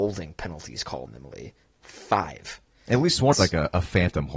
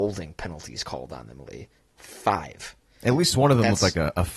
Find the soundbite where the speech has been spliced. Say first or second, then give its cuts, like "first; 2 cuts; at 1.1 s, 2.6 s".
first; 2 cuts; at 1.1 s, 3.3 s